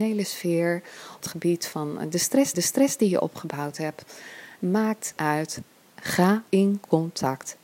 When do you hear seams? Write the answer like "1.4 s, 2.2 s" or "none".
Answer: 1.2 s, 2.5 s, 5.2 s, 6.5 s